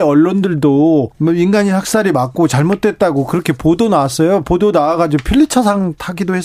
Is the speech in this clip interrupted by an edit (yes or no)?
yes